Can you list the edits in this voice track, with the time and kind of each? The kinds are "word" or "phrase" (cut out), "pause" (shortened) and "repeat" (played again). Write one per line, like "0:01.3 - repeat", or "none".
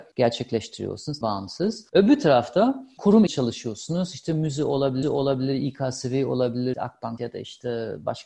0:01.2 - word
0:01.9 - pause
0:03.3 - word
0:05.0 - repeat
0:06.7 - phrase
0:07.2 - word